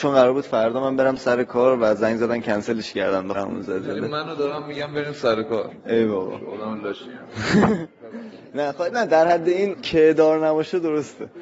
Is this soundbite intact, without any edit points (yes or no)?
no